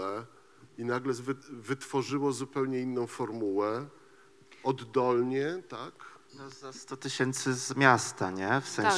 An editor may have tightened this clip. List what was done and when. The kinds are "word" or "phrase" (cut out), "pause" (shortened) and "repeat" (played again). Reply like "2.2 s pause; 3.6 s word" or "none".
none